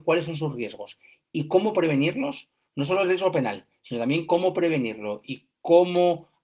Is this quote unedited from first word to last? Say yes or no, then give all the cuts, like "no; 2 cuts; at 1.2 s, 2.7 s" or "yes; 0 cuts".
yes; 0 cuts